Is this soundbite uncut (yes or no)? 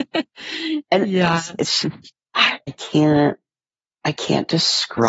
yes